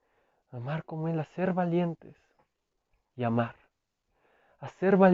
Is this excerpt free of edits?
yes; 0 cuts

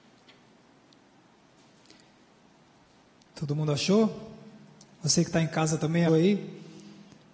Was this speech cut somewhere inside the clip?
yes; 1 cut; at 6.1 s

